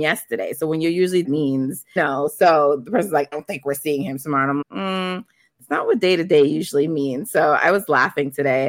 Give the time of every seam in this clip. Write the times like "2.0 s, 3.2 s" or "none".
1.2 s, 2.0 s, 3.3 s, 4.6 s